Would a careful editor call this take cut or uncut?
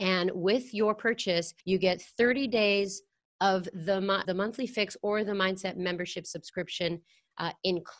cut